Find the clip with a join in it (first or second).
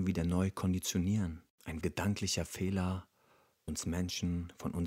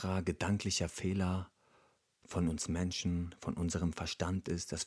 first